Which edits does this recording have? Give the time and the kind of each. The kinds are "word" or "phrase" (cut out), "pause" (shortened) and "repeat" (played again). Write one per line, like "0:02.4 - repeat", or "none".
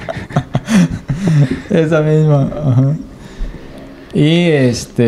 none